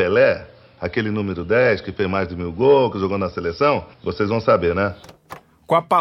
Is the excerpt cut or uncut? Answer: cut